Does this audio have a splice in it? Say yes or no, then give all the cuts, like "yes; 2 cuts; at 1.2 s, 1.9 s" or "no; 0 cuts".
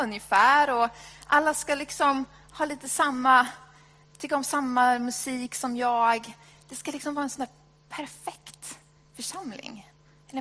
no; 0 cuts